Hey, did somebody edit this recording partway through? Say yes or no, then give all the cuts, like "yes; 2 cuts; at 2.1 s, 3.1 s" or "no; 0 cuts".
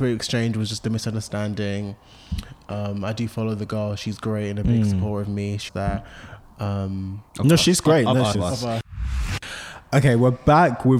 yes; 3 cuts; at 5.7 s, 7.3 s, 8.3 s